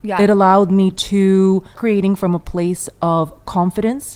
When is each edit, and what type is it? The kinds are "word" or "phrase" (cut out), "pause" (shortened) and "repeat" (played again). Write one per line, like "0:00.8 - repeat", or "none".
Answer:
0:01.7 - word

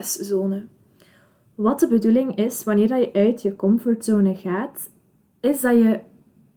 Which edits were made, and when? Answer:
none

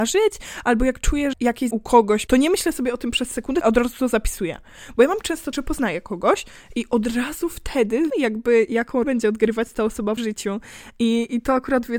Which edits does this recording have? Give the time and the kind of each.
0:01.3 - word
0:01.7 - word
0:02.3 - word
0:03.6 - word
0:05.5 - word
0:08.1 - word
0:09.0 - word
0:10.2 - word

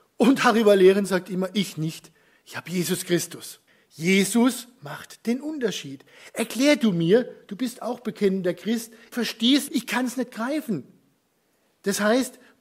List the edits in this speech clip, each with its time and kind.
0:03.7 - pause
0:09.1 - word
0:09.7 - word

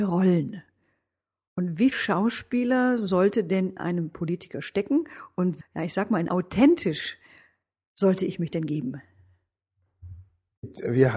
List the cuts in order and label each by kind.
0:01.9 - word
0:03.8 - word
0:05.6 - word
0:06.3 - word

